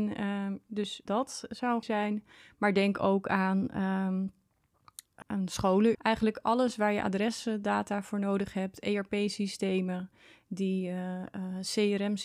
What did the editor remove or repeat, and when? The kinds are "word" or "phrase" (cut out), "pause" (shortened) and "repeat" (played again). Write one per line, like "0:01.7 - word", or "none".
0:01.1 - word
0:01.8 - word
0:05.2 - word
0:05.9 - word